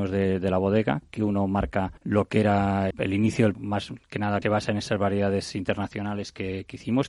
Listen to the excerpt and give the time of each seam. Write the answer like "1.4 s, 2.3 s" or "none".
2.0 s, 2.9 s, 3.5 s, 4.4 s